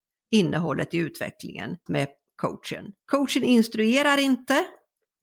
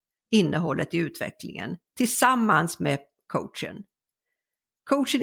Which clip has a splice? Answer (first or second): first